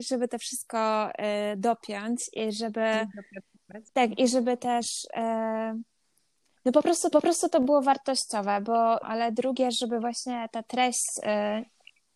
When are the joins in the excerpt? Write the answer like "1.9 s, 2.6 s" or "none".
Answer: 3.9 s, 7.1 s, 9.0 s

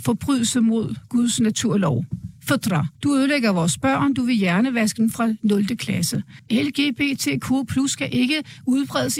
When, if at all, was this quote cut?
2.9 s

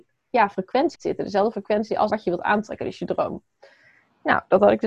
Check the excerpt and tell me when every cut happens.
0.9 s, 2.1 s

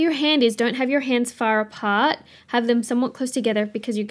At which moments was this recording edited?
none

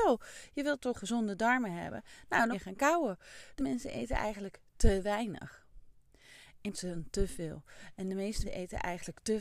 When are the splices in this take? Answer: 0.9 s, 2.5 s, 3.6 s, 6.7 s, 8.4 s

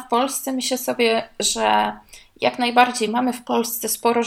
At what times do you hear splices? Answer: none

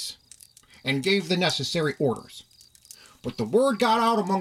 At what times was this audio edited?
none

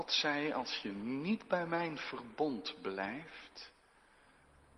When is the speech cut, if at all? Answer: none

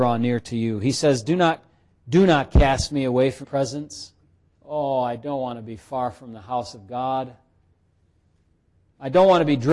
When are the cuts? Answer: 3.4 s, 4.2 s

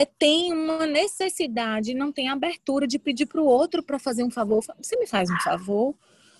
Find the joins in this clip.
none

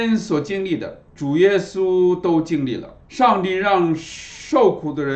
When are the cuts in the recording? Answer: 1.1 s, 3.0 s

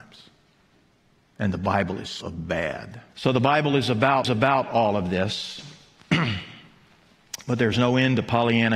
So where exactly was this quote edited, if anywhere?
2.2 s, 3.1 s, 4.2 s

